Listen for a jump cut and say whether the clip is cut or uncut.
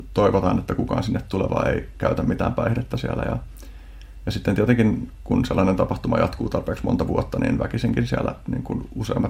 uncut